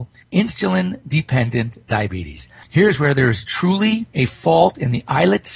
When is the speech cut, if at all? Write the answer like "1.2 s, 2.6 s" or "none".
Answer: 4.1 s